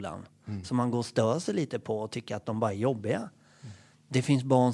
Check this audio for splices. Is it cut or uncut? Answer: uncut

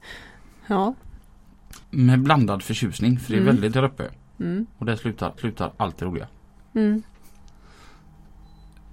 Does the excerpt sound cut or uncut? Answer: cut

